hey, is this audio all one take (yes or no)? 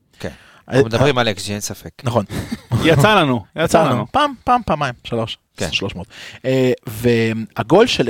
yes